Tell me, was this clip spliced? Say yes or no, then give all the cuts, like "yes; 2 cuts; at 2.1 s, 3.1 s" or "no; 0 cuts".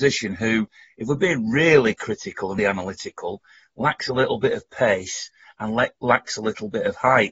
yes; 1 cut; at 2.6 s